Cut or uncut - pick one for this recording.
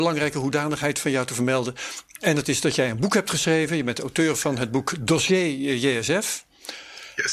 uncut